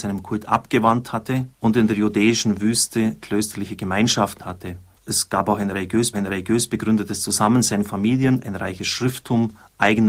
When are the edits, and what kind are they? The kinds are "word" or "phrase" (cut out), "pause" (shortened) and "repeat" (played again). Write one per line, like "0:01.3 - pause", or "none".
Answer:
0:01.5 - pause
0:04.4 - word
0:06.1 - repeat